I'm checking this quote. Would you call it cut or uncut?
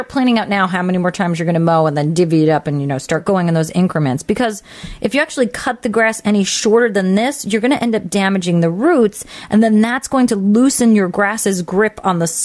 uncut